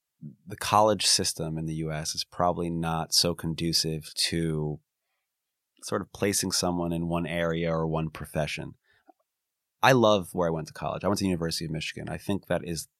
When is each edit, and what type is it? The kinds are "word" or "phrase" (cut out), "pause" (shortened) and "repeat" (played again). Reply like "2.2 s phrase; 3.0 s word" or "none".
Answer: none